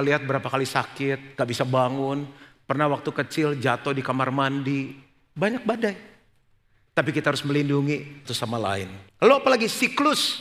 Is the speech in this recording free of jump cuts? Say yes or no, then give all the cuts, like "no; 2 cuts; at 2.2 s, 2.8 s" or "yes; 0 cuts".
no; 2 cuts; at 8.2 s, 9.1 s